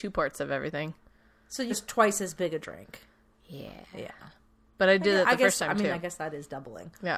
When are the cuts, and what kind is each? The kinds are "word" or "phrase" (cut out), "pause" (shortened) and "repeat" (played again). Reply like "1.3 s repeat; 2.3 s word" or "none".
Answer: 1.7 s word